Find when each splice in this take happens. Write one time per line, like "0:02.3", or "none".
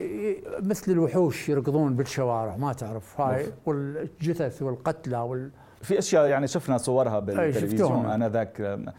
none